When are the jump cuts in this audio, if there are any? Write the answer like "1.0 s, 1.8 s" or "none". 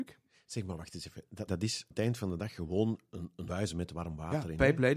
1.5 s, 1.9 s, 3.1 s, 3.5 s